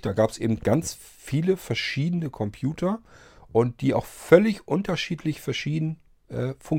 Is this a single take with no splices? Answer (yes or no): yes